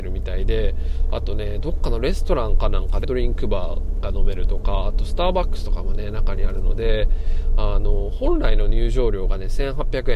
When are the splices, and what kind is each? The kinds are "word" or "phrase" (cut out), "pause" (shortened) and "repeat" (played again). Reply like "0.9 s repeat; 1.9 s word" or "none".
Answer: 3.0 s word